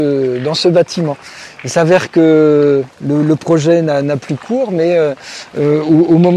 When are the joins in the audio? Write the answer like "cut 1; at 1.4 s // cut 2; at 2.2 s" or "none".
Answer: cut 1; at 2.9 s